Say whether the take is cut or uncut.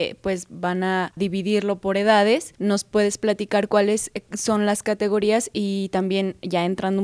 uncut